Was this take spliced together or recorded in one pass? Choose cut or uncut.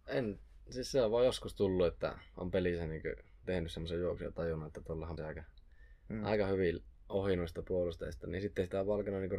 cut